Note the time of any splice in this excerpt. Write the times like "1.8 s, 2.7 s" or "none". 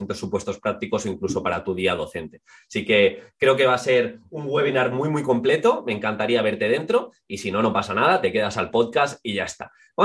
none